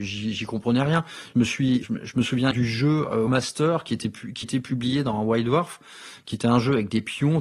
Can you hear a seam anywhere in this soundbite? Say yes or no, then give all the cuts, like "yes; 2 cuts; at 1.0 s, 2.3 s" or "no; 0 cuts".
yes; 4 cuts; at 1.8 s, 2.5 s, 3.3 s, 4.4 s